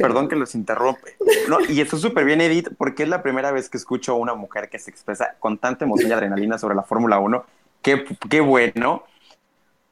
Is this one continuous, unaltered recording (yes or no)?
yes